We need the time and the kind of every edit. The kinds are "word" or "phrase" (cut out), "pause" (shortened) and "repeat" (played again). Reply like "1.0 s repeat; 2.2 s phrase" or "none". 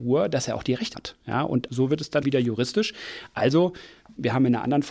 0.9 s word; 1.7 s word; 2.2 s word